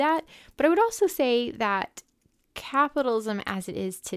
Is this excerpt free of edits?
yes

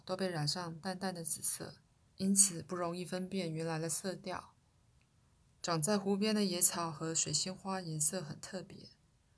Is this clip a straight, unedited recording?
no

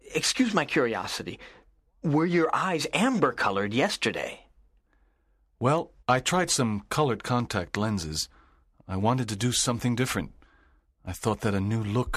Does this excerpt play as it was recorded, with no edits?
no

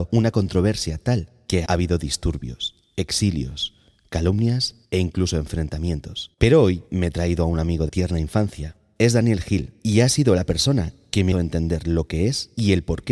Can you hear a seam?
yes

